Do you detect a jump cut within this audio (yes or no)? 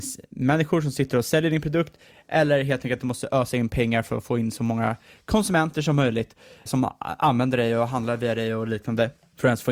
yes